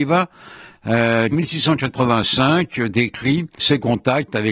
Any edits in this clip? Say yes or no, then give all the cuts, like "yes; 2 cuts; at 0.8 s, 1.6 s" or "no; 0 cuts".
yes; 2 cuts; at 1.3 s, 3.6 s